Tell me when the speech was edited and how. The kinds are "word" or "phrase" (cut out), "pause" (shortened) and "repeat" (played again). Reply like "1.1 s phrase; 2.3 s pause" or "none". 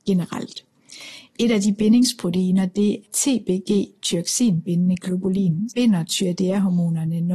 3.0 s word; 5.7 s word